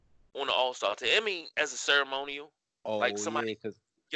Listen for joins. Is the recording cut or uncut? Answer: cut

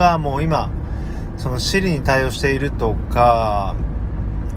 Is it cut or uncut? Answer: uncut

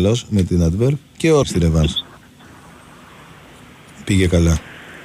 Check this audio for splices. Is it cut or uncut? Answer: cut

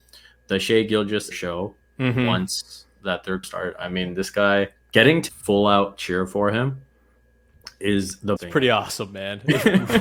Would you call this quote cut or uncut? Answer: cut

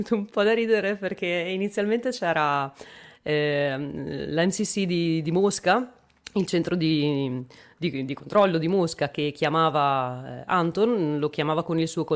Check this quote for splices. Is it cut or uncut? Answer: uncut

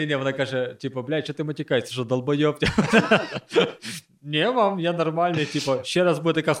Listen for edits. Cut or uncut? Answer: uncut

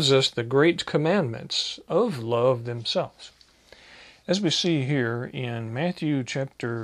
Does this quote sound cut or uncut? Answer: uncut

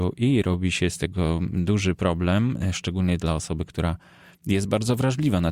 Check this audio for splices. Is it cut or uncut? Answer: uncut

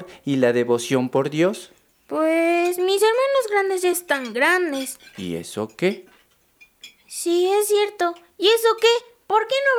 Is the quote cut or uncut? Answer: uncut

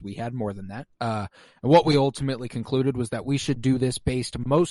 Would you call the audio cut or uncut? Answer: cut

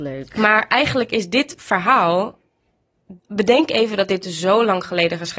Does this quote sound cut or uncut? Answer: cut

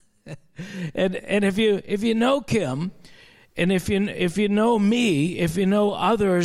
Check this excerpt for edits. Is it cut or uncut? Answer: uncut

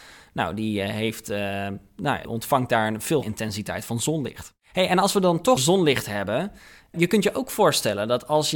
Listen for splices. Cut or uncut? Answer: cut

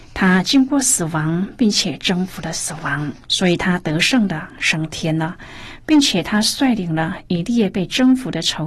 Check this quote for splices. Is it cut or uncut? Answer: cut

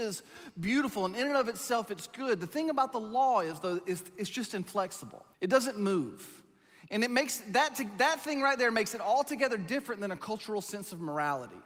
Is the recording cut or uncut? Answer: cut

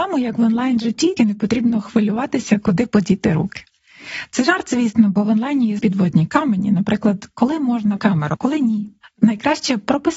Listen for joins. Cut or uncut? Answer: cut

